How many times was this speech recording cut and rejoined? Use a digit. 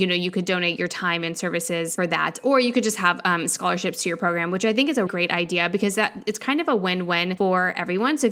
1